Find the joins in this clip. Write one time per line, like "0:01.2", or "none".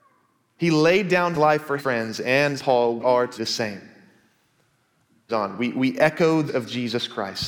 0:01.3
0:01.8
0:02.6
0:03.0
0:03.4
0:05.3
0:06.5